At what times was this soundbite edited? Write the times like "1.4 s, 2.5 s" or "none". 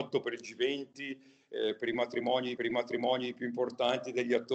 2.6 s